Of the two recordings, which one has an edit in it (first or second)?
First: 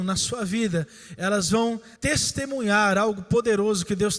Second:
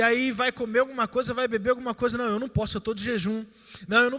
first